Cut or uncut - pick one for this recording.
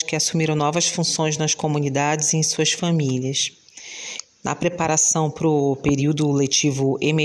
uncut